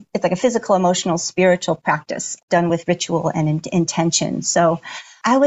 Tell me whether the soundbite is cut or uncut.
uncut